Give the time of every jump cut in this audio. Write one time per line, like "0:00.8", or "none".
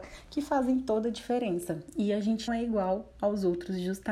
0:02.5